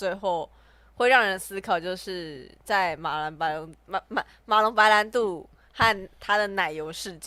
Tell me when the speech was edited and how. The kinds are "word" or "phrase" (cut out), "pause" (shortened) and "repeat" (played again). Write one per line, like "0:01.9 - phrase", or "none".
none